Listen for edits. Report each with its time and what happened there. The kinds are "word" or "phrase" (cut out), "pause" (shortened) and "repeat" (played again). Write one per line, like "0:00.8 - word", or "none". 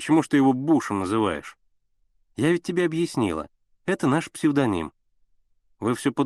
none